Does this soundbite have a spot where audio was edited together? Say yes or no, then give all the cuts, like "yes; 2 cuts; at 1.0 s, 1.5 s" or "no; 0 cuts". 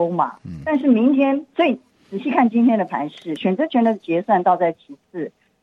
no; 0 cuts